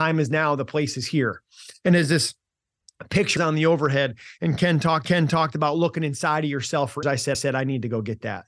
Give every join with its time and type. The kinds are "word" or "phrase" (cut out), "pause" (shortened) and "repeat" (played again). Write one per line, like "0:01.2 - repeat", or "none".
0:03.4 - word
0:05.0 - repeat
0:07.0 - word
0:07.3 - repeat